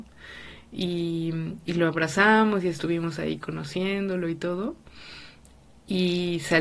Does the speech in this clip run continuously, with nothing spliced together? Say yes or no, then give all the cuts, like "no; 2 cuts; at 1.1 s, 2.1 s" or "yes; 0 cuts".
yes; 0 cuts